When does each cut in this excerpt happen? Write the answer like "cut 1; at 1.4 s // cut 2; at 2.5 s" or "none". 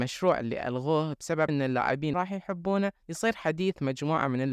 cut 1; at 1.5 s // cut 2; at 2.1 s